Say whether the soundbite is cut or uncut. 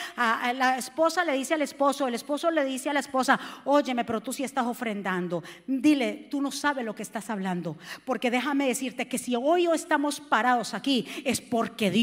uncut